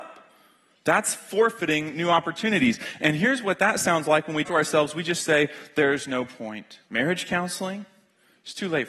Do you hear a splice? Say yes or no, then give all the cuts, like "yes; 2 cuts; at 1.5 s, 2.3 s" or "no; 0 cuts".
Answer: yes; 2 cuts; at 4.4 s, 6.8 s